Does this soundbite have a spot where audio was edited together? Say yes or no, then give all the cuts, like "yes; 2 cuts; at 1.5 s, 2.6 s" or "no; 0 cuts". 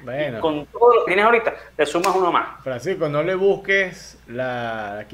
yes; 1 cut; at 1.1 s